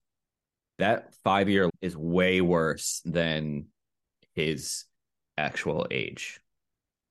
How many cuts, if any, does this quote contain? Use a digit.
1